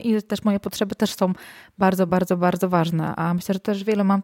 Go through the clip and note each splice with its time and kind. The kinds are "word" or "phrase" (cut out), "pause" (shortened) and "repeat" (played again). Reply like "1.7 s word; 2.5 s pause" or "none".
none